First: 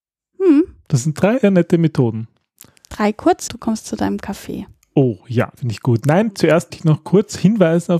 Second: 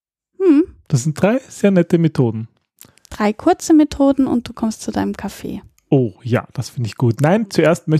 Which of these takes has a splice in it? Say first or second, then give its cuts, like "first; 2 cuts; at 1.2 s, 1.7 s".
first; 4 cuts; at 1.4 s, 3.5 s, 5.6 s, 6.7 s